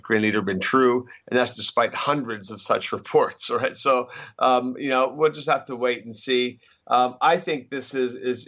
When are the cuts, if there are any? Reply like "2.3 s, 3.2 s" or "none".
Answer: none

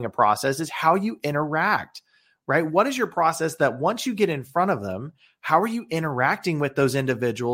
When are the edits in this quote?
none

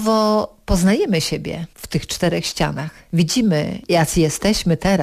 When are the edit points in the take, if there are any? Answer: none

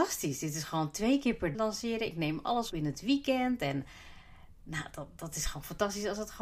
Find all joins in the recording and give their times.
1.5 s, 2.7 s

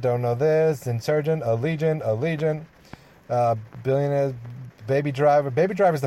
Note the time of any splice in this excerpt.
none

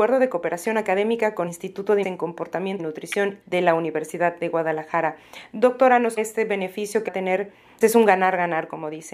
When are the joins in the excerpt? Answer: 1.5 s, 2.0 s, 2.8 s, 3.4 s, 6.2 s, 7.1 s, 7.8 s

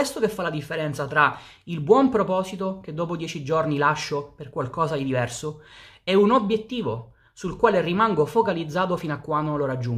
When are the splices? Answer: none

